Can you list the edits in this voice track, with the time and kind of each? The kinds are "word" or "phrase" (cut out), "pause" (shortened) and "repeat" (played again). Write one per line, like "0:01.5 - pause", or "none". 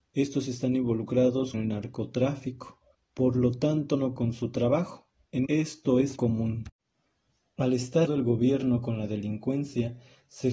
0:01.5 - word
0:02.9 - pause
0:04.2 - word
0:05.5 - word
0:06.2 - word
0:08.1 - word

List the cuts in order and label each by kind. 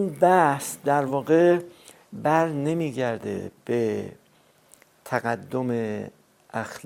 none

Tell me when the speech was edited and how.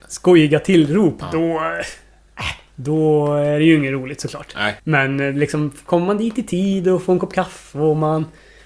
0:04.8 - pause

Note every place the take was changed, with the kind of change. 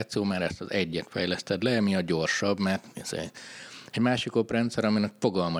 none

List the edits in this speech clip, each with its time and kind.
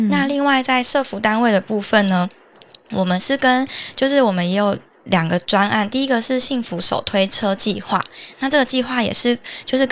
none

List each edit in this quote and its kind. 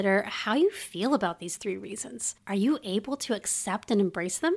0:02.4 - pause

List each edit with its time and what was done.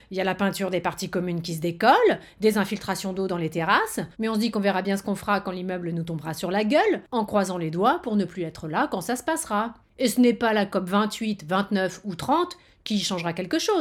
0:04.1 - pause
0:09.8 - pause

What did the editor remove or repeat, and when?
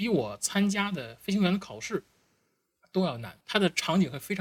0:03.4 - pause

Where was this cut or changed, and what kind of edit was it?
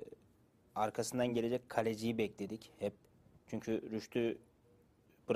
none

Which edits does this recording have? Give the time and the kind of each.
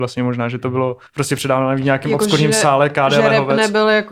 0:01.1 - pause

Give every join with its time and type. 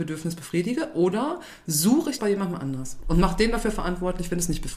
0:02.2 - word

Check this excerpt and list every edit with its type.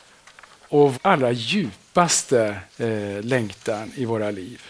0:00.9 - word
0:02.7 - pause

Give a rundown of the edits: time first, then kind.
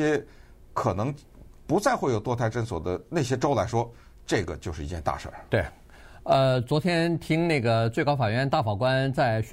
none

